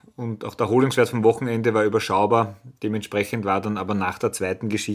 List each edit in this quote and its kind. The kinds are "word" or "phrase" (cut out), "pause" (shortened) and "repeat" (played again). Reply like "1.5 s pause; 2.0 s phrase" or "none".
none